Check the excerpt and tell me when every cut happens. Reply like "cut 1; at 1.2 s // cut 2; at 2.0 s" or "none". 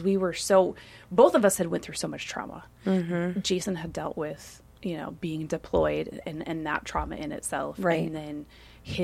none